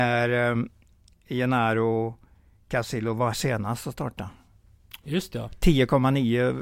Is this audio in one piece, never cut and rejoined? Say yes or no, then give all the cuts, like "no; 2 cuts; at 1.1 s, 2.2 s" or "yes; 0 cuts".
no; 1 cut; at 3.3 s